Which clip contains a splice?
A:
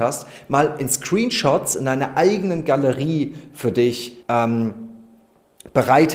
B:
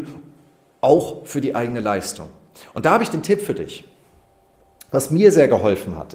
A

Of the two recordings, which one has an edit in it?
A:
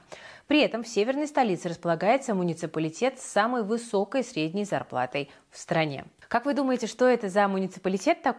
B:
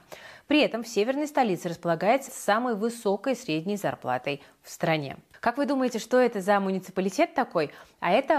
B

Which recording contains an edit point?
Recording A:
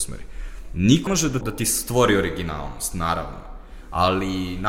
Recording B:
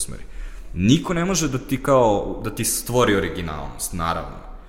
A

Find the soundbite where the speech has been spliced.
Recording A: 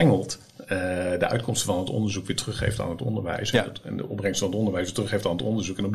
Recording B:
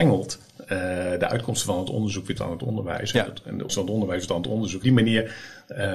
B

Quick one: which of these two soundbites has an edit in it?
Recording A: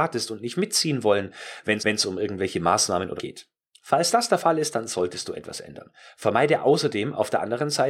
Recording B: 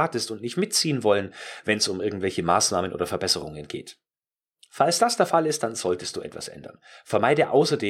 A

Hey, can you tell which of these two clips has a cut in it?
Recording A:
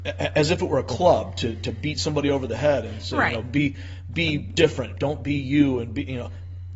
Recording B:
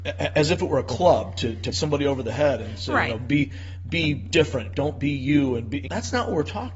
B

